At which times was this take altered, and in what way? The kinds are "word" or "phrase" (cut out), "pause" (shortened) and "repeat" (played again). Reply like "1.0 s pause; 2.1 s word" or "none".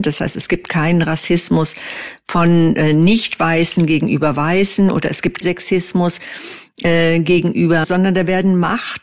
5.4 s word; 7.8 s word